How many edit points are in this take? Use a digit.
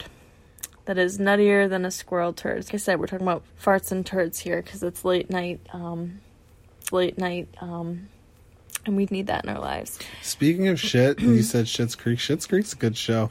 4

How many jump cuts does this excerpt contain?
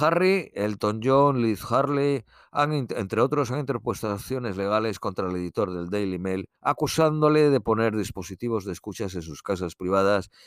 1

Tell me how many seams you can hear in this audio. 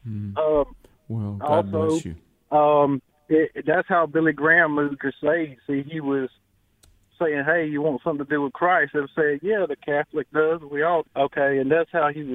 2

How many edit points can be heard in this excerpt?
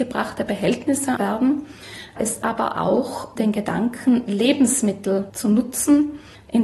4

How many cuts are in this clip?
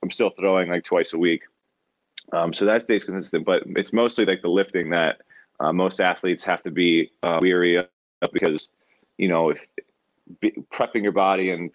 0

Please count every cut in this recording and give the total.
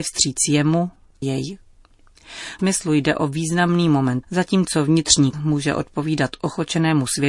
4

